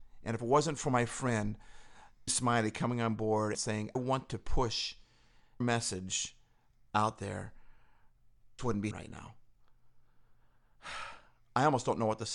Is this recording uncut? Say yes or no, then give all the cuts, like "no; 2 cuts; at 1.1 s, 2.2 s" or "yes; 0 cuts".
no; 6 cuts; at 2.3 s, 3.5 s, 4.0 s, 5.6 s, 8.6 s, 8.9 s